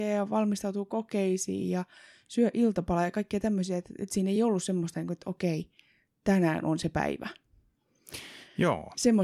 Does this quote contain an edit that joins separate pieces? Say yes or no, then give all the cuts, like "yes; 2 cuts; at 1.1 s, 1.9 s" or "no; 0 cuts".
no; 0 cuts